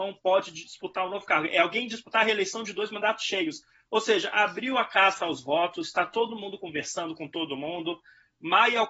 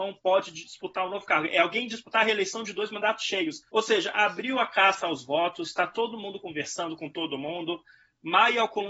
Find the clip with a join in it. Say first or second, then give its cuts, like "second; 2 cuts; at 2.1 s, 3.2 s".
second; 1 cut; at 3.7 s